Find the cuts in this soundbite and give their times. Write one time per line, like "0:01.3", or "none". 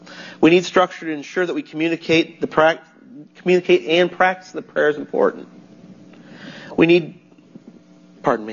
0:03.3